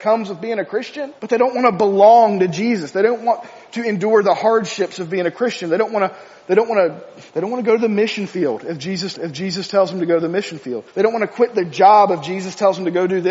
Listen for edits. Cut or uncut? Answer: cut